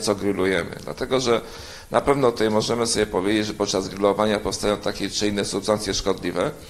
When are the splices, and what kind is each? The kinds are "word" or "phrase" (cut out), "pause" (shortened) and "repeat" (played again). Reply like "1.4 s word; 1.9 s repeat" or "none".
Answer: none